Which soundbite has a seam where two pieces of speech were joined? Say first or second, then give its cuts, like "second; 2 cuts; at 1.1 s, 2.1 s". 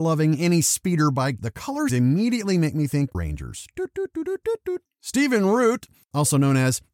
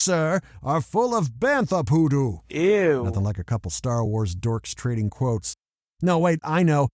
first; 3 cuts; at 1.4 s, 1.9 s, 3.1 s